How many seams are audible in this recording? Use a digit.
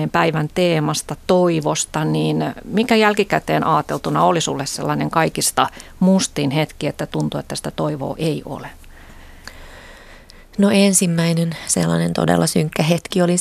0